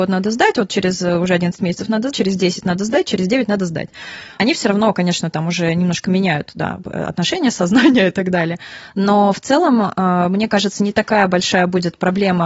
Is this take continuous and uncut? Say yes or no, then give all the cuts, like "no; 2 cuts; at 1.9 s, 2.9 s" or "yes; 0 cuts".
no; 2 cuts; at 2.1 s, 4.4 s